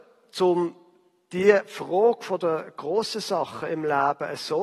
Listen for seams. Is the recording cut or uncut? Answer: uncut